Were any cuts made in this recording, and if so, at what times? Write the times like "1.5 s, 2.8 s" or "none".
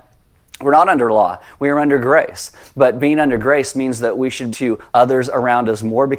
4.5 s, 4.9 s